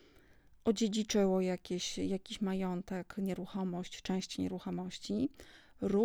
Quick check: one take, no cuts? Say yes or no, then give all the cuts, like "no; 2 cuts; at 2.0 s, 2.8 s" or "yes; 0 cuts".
yes; 0 cuts